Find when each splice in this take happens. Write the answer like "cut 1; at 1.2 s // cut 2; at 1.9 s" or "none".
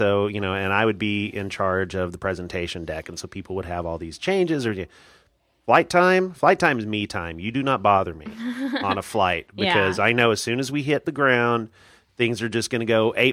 none